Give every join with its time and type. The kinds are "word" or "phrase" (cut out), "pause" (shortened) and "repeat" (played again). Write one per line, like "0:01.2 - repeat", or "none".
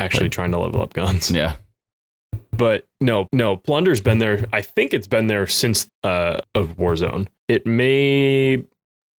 0:03.3 - repeat
0:05.9 - word
0:06.4 - word
0:07.4 - pause